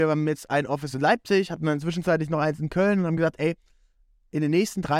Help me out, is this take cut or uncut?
uncut